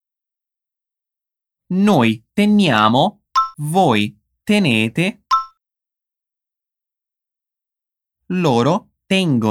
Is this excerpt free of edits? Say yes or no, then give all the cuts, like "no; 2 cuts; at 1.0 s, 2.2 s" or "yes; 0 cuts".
no; 1 cut; at 3.5 s